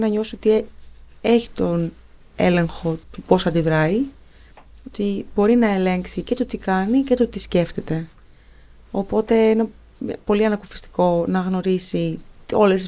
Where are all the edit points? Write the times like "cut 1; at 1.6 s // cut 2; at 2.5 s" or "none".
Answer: cut 1; at 3.0 s